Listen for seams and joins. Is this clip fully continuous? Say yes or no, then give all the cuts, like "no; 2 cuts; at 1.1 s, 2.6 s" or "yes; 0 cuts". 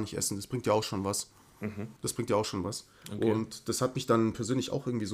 no; 1 cut; at 2.0 s